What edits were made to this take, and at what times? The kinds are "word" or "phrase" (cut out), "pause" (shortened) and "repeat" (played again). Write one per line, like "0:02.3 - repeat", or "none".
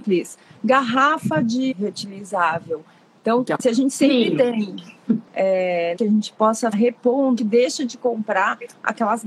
0:01.7 - word
0:03.6 - word
0:05.3 - word
0:06.0 - word
0:06.7 - word
0:07.4 - word